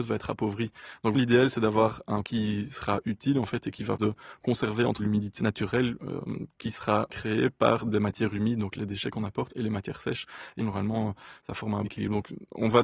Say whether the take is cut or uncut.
cut